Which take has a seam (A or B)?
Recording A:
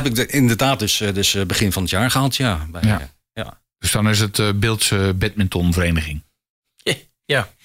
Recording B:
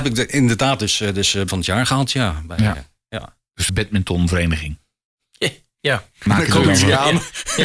B